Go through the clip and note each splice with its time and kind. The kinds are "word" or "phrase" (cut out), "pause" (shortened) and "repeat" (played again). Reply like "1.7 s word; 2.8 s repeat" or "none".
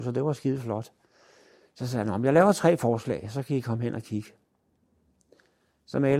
none